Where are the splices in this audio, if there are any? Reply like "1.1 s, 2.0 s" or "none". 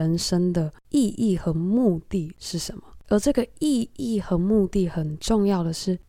none